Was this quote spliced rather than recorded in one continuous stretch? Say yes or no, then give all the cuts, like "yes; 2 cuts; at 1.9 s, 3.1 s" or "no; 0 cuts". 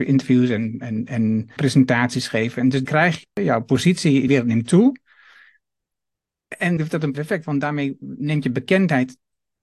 yes; 6 cuts; at 1.6 s, 2.8 s, 3.2 s, 4.3 s, 6.8 s, 7.1 s